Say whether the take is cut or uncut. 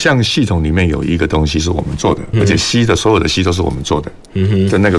cut